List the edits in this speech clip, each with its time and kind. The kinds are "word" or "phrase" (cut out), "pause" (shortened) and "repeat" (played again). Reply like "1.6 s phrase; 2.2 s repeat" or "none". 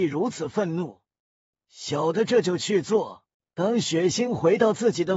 1.2 s pause; 3.3 s pause

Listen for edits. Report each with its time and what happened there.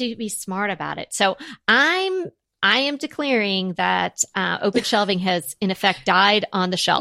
none

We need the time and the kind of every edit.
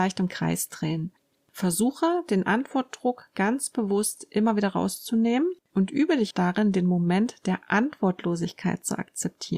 6.3 s word

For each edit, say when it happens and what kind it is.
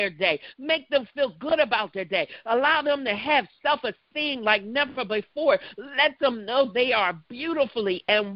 none

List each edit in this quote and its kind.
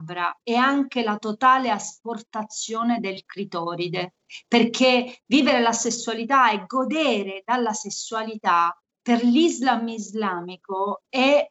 none

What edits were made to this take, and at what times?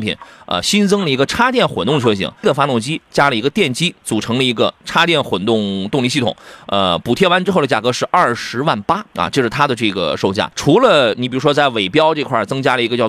2.4 s phrase; 9.1 s pause; 10.5 s pause

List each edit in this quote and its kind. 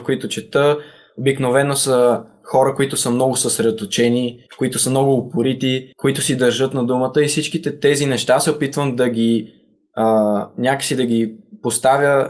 4.5 s pause; 5.9 s pause

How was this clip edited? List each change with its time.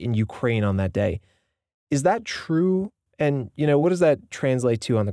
none

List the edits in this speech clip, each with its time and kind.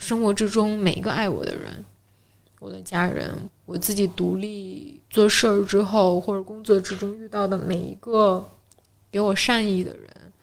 3.5 s phrase; 5.1 s pause

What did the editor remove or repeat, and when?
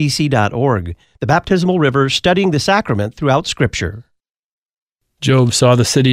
none

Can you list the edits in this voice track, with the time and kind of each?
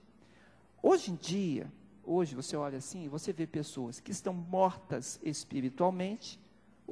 none

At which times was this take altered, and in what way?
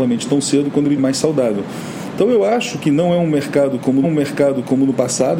1.0 s word; 4.0 s repeat

